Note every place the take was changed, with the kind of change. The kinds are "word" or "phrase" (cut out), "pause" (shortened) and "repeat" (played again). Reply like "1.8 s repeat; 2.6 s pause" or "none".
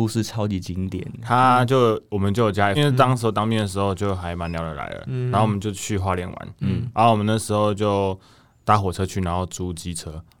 2.7 s phrase